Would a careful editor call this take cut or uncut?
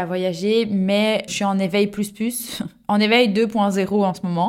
cut